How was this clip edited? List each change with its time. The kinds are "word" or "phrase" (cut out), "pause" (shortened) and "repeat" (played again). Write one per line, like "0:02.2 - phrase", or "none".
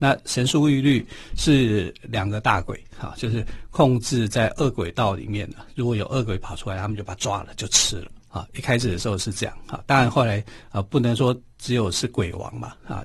0:08.2 - pause